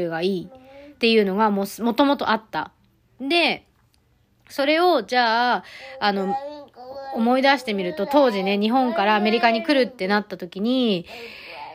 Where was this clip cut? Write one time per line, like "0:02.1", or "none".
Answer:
none